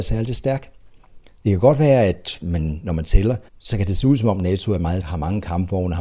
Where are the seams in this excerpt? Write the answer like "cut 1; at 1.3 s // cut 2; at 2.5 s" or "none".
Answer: cut 1; at 3.5 s // cut 2; at 5.0 s